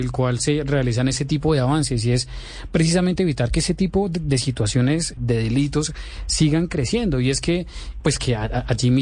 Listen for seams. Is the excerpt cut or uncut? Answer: cut